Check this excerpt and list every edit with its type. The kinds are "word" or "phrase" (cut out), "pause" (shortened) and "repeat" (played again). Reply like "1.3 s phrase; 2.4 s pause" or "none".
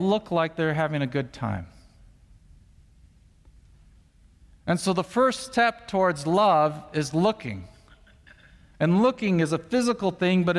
none